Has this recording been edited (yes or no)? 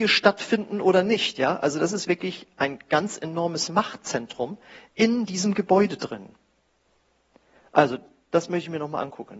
no